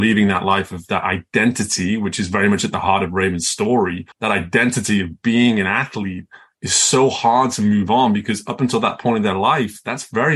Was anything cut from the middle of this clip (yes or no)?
yes